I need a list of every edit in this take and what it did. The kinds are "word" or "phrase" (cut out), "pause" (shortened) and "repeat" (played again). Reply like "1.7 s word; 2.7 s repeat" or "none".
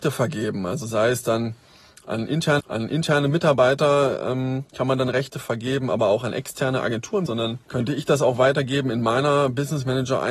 2.6 s repeat; 4.7 s pause; 7.3 s phrase; 7.6 s pause